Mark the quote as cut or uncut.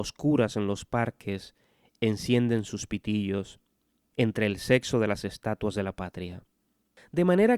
uncut